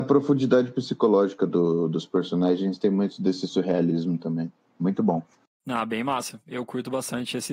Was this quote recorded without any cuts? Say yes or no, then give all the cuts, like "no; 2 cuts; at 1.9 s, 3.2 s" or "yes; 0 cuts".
yes; 0 cuts